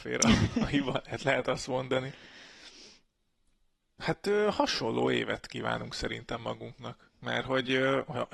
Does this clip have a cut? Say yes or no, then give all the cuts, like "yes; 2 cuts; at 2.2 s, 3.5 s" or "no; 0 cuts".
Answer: no; 0 cuts